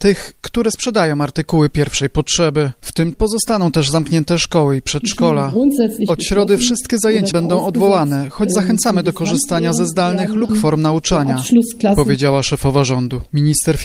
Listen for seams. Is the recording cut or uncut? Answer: cut